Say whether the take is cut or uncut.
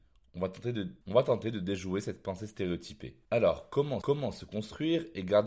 cut